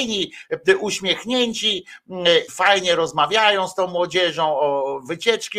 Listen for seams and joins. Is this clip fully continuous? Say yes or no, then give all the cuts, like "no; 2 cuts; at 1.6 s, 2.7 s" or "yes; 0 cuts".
no; 1 cut; at 2.5 s